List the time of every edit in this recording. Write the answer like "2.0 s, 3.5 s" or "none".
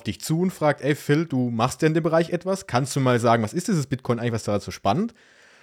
none